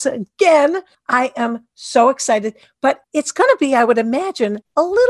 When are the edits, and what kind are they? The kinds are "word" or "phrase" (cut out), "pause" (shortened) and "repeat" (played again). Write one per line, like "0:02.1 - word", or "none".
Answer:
none